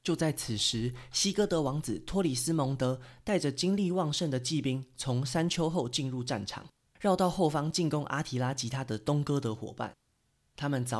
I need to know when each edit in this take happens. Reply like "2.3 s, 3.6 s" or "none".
none